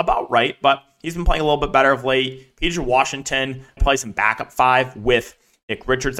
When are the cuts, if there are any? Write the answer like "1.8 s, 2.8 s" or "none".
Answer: 3.8 s